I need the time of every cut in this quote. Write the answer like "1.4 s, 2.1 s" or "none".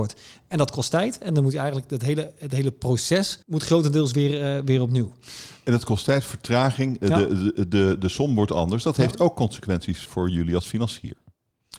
3.4 s, 10.1 s

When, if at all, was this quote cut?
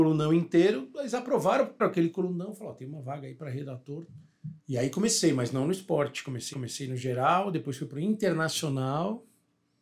1.8 s, 4.6 s, 6.5 s

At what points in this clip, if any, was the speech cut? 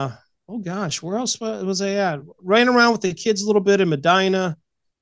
none

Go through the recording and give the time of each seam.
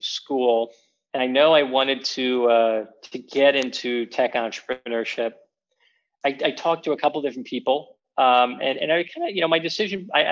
none

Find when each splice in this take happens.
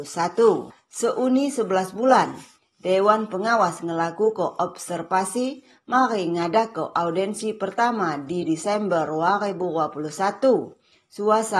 none

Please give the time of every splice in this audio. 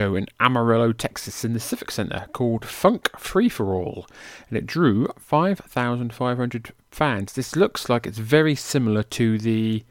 none

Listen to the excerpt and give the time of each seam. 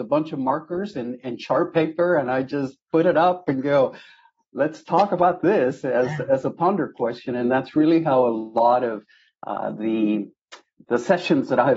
none

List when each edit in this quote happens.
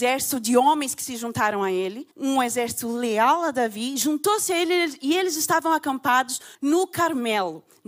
2.1 s, 6.5 s

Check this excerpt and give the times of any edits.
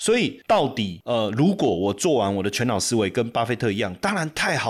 1.0 s

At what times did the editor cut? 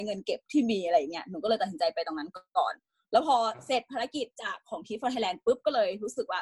none

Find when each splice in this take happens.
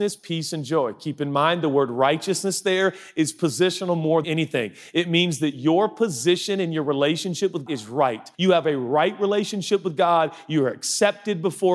4.2 s, 7.7 s, 8.3 s

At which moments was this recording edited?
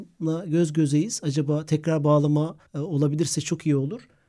2.7 s

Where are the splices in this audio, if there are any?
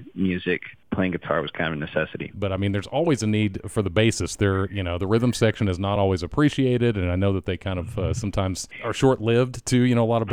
none

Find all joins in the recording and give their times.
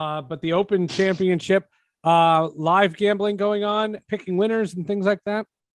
4.0 s

